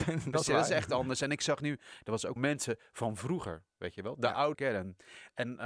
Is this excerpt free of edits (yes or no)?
no